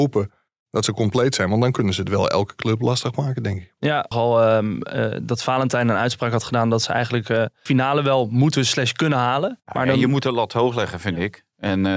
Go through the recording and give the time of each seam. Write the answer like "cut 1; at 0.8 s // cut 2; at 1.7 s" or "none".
cut 1; at 4.1 s // cut 2; at 7.7 s // cut 3; at 9.6 s

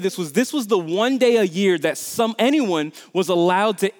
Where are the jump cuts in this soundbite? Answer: none

